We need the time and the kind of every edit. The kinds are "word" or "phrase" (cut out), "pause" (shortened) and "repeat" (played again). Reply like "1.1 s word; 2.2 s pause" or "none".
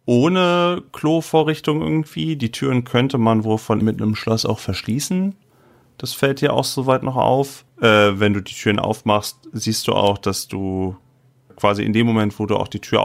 3.8 s word; 7.7 s pause; 11.5 s word